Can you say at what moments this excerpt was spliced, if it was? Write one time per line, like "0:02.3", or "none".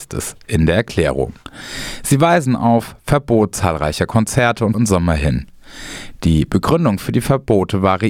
0:04.7